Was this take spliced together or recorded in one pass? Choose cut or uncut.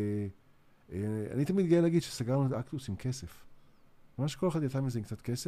uncut